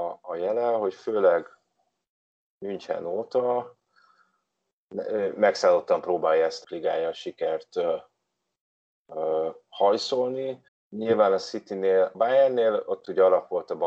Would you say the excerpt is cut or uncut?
cut